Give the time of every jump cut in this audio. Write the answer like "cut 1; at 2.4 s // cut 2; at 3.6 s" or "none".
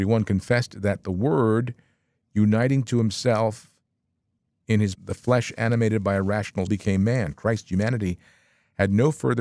cut 1; at 4.9 s // cut 2; at 6.7 s